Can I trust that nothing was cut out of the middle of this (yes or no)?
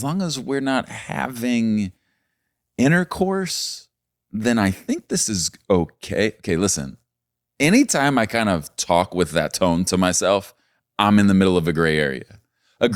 yes